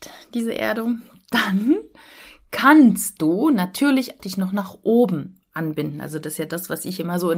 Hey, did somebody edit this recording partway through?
yes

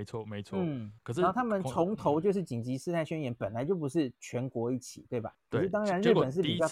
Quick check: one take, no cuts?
no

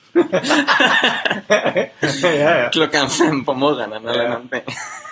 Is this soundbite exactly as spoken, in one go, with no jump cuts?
yes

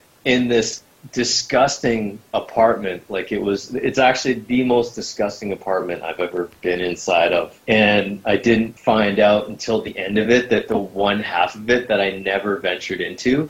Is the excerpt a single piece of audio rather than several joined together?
yes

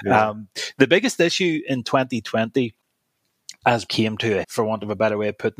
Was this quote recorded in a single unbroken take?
no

